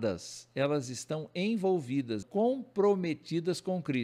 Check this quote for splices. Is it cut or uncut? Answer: cut